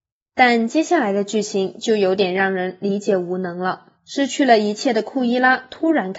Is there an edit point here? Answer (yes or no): yes